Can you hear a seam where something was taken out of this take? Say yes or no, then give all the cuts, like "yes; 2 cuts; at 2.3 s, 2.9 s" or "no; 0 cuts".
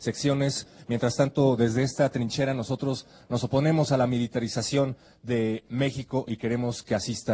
no; 0 cuts